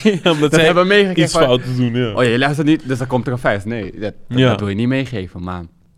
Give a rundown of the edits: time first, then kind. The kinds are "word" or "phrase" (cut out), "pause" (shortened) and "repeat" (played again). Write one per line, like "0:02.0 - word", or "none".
none